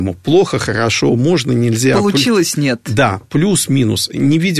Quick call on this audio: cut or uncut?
uncut